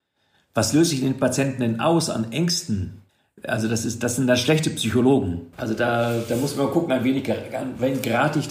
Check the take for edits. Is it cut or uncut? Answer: cut